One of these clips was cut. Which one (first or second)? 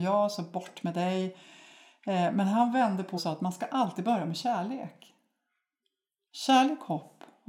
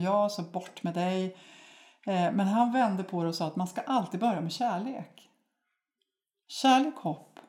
first